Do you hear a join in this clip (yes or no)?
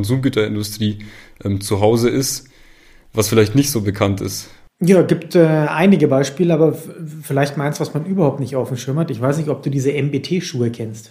no